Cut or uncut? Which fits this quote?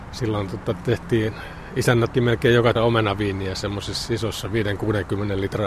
cut